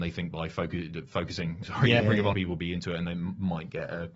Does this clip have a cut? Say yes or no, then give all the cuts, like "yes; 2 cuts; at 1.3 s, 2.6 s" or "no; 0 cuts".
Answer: yes; 3 cuts; at 1.6 s, 2.0 s, 2.3 s